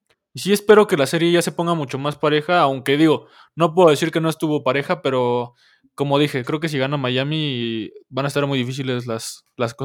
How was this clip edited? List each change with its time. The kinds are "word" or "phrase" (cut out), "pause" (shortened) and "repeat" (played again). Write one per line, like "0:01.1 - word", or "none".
none